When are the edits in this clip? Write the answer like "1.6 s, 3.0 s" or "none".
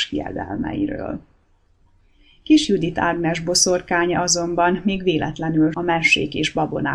5.7 s